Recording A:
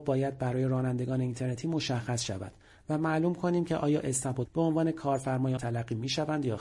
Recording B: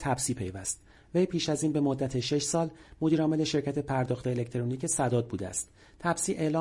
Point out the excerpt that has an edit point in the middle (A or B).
A